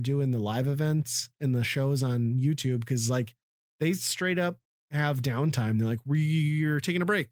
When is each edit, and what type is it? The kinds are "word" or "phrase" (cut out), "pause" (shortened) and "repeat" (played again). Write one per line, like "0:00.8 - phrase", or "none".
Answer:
none